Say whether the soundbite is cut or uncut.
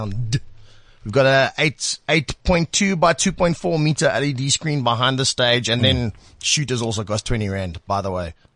uncut